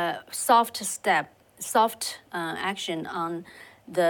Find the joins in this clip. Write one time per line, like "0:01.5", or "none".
0:02.3

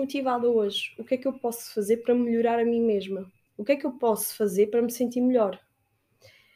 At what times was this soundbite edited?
0:03.5

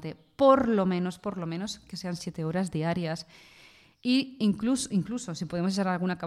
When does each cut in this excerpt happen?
none

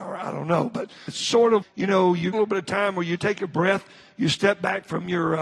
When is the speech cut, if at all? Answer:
0:01.1
0:01.6
0:02.3
0:03.2

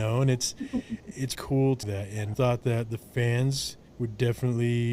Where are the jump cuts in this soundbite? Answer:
0:01.3
0:01.8
0:02.3
0:03.9

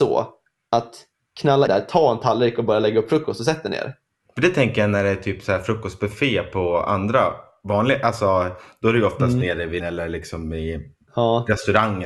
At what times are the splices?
0:01.7
0:09.8

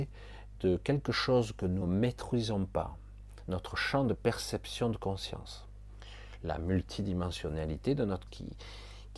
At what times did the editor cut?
0:01.8
0:08.3

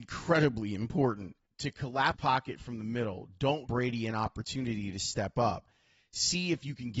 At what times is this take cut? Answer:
0:01.5
0:02.1
0:03.7

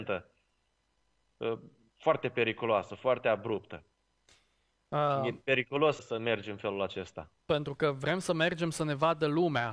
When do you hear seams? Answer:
0:06.0
0:07.4

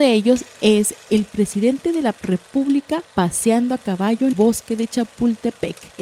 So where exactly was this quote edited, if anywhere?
0:04.3

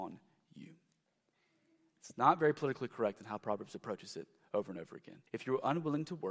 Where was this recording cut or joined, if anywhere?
0:05.3

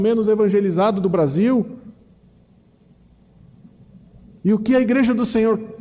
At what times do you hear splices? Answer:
none

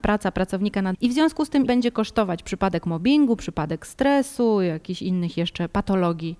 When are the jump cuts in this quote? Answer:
0:00.9
0:01.7

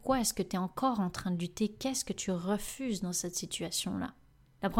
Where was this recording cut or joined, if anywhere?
none

